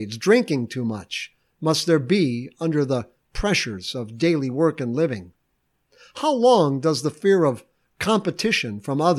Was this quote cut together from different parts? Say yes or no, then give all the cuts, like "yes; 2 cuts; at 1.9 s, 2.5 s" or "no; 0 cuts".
no; 0 cuts